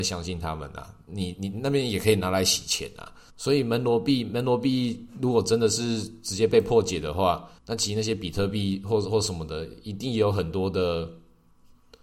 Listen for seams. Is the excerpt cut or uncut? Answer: cut